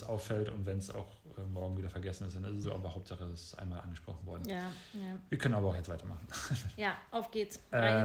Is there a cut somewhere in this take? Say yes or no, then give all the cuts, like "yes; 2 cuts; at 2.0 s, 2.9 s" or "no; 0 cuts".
yes; 1 cut; at 2.6 s